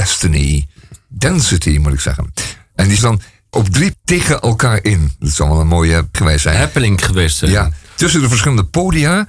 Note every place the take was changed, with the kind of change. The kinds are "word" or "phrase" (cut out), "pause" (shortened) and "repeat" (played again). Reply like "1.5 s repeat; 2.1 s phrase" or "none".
3.0 s word; 3.5 s word; 3.9 s word; 6.1 s word